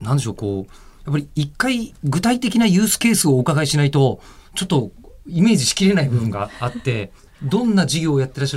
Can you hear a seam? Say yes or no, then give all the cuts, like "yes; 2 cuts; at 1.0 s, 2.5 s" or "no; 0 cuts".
no; 0 cuts